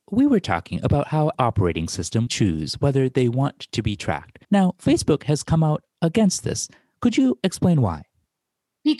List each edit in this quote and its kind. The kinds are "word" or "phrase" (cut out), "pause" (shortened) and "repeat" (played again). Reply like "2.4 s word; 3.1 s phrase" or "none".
1.3 s phrase; 2.3 s phrase; 4.4 s pause